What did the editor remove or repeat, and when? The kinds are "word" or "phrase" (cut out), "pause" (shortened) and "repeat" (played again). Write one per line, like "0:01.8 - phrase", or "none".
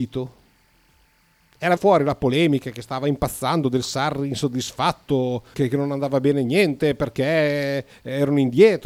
0:01.8 - word
0:05.5 - word

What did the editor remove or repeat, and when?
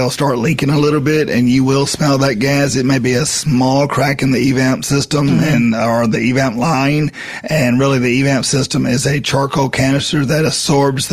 none

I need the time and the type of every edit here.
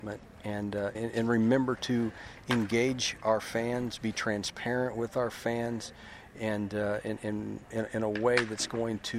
0:00.9 - word
0:07.7 - word

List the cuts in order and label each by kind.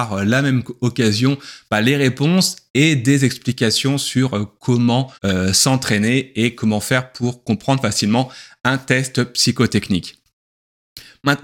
0:05.1 - pause

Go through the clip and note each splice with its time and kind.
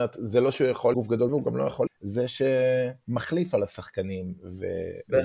0:00.9 - word
0:01.3 - word
0:01.9 - word

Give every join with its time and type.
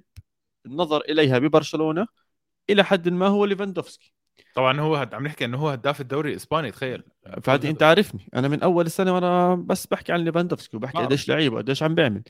none

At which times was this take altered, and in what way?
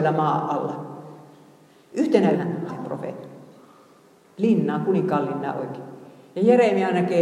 0:02.3 - word
0:02.7 - word

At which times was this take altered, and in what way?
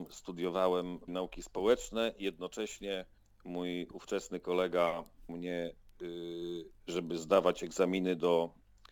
0:01.1 - word
0:03.2 - pause
0:05.3 - word

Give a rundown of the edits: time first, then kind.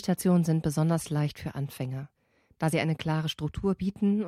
none

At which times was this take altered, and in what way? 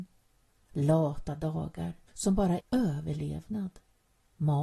0:02.1 - pause
0:02.6 - word

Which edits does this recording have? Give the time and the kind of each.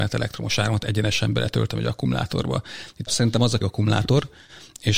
0:03.1 - word
0:03.6 - phrase

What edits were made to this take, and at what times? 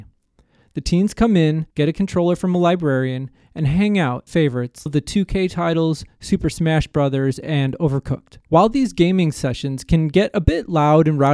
0:01.7 - pause
0:04.3 - phrase
0:04.9 - phrase
0:08.4 - pause

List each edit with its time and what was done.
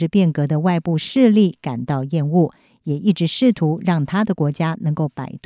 none

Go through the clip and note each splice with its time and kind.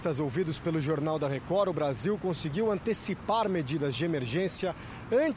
none

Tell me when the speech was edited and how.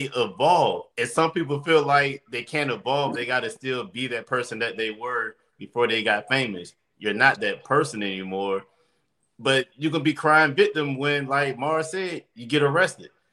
0:00.9 - pause
0:09.7 - pause

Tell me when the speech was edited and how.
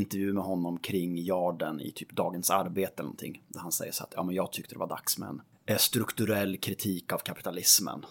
none

